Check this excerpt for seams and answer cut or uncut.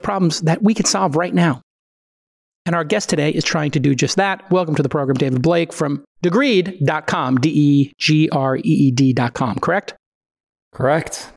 uncut